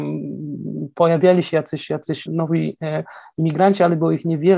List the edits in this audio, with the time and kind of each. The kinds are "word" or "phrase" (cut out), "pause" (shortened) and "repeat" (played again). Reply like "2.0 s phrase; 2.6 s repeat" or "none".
2.3 s word